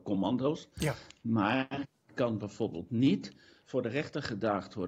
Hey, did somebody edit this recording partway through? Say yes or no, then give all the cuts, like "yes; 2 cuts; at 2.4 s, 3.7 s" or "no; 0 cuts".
no; 0 cuts